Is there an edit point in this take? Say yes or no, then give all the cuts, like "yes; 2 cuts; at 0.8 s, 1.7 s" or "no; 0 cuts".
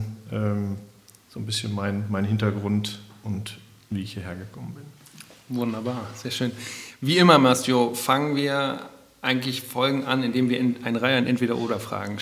no; 0 cuts